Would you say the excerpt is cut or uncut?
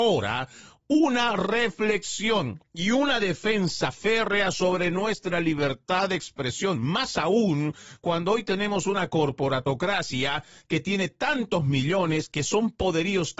uncut